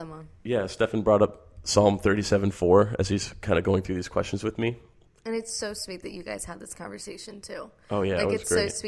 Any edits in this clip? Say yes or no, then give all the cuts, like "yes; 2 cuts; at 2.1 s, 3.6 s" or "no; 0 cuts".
no; 0 cuts